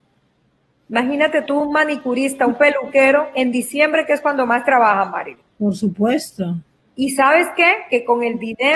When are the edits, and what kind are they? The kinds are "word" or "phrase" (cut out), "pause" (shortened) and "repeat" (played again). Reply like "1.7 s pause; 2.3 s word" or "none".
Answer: none